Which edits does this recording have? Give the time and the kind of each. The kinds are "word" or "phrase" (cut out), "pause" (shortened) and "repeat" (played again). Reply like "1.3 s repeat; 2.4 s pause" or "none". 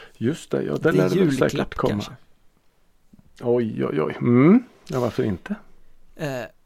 none

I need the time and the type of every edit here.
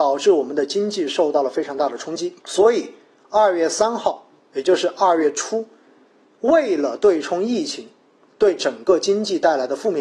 2.4 s pause

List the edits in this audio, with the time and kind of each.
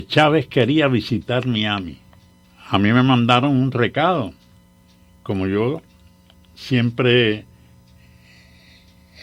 2.4 s pause; 4.6 s pause

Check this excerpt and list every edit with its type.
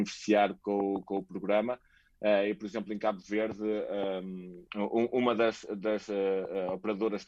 4.7 s pause

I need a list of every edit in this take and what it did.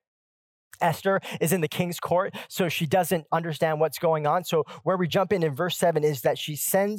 none

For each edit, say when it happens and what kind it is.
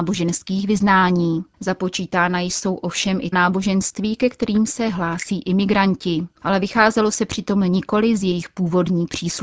1.5 s pause; 3.3 s word

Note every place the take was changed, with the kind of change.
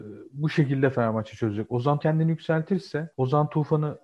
2.0 s word

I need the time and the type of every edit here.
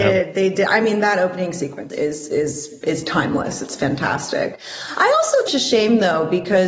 1.9 s word; 5.5 s phrase

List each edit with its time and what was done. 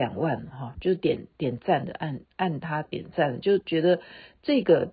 2.2 s pause

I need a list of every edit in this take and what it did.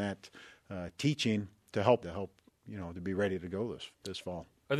2.0 s phrase; 2.5 s word

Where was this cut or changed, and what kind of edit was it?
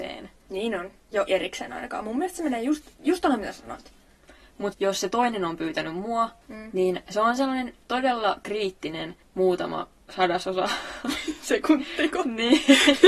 1.3 s word; 2.9 s pause; 4.7 s word

